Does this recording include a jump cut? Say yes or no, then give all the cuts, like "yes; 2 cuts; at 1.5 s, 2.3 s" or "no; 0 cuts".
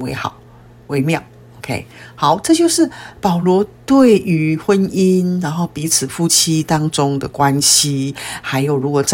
no; 0 cuts